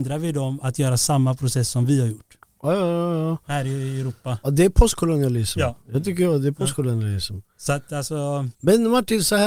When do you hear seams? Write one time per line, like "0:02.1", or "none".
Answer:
0:05.8
0:08.5